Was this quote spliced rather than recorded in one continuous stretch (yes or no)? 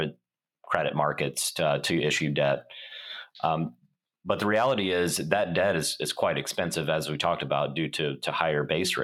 no